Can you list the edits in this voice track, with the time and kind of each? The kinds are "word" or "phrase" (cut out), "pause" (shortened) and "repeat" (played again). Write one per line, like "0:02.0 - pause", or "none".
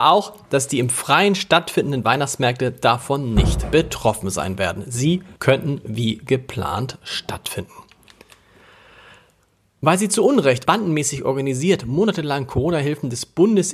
0:05.4 - pause
0:10.7 - word